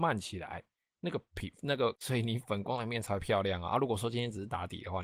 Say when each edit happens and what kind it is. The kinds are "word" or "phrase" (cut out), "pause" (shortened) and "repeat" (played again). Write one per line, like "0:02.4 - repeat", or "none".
0:02.0 - phrase